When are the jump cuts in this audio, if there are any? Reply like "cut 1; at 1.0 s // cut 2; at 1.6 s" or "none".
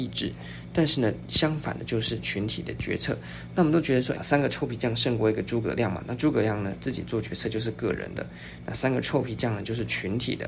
cut 1; at 4.1 s